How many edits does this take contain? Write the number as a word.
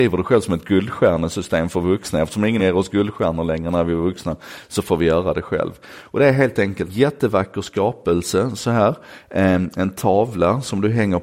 two